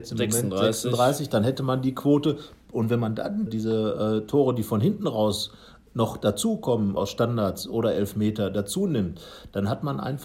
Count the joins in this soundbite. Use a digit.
2